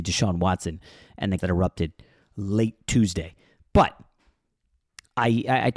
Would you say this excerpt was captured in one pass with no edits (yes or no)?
no